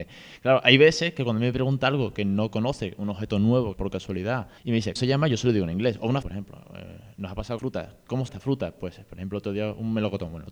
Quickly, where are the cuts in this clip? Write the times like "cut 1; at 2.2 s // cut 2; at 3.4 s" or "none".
cut 1; at 3.7 s // cut 2; at 4.6 s // cut 3; at 5.0 s // cut 4; at 6.2 s // cut 5; at 7.6 s // cut 6; at 8.3 s